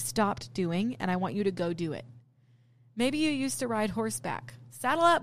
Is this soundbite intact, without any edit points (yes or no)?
yes